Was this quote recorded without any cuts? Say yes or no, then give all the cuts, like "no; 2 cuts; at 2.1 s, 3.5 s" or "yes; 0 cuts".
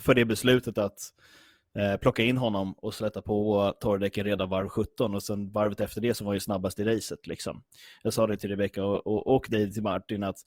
yes; 0 cuts